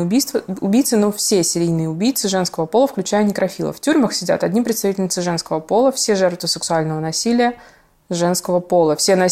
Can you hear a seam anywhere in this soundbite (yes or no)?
no